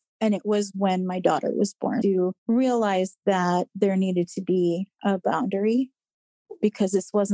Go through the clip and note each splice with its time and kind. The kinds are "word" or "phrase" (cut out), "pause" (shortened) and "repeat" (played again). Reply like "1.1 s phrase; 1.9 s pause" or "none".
2.0 s phrase; 2.4 s pause